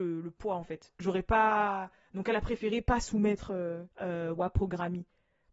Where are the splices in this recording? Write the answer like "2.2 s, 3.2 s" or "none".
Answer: 3.9 s